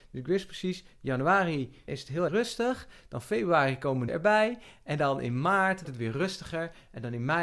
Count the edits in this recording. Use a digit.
4